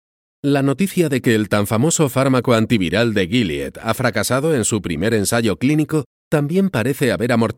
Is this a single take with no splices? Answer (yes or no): yes